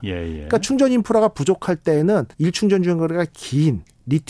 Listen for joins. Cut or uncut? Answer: cut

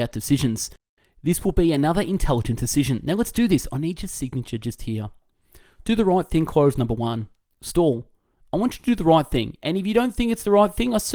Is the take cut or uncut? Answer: uncut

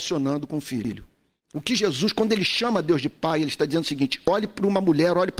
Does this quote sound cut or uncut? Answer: uncut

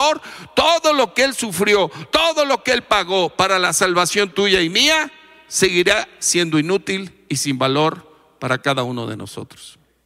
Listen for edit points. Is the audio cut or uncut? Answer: uncut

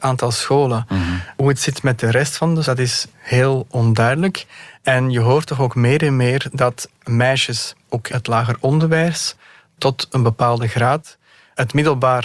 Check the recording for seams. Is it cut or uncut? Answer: cut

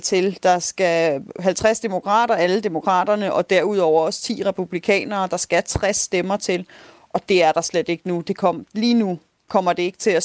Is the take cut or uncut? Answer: uncut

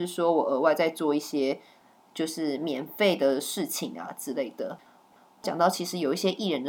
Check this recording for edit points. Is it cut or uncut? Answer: uncut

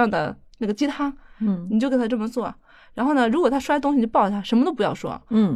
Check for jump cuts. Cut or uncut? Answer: uncut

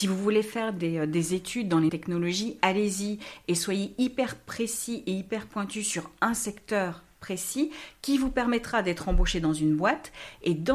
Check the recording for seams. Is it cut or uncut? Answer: cut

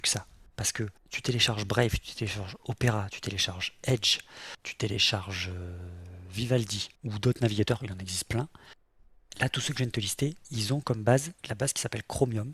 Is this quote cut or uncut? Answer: cut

